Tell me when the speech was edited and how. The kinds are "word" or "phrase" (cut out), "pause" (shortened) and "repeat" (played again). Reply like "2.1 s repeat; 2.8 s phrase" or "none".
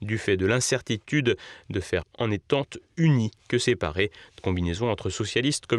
2.0 s word; 3.4 s pause; 4.4 s phrase